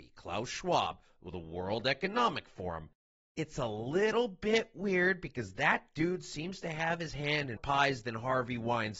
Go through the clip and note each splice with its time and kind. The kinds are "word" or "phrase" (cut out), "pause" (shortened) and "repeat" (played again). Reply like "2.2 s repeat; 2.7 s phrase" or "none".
7.6 s word